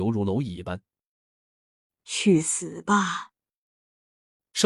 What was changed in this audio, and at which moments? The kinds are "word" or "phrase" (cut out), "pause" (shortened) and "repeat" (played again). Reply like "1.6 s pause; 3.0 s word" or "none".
none